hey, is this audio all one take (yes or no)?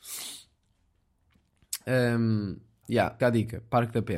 no